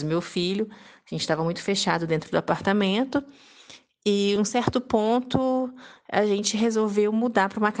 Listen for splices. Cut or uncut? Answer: uncut